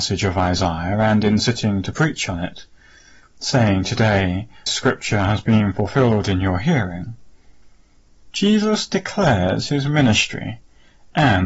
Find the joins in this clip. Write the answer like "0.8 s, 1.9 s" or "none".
4.7 s